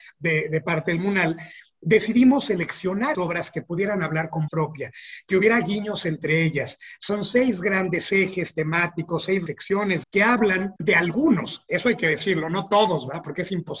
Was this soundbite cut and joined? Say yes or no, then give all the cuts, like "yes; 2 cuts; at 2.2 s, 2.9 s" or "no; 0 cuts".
yes; 5 cuts; at 3.1 s, 4.5 s, 9.5 s, 10.0 s, 10.8 s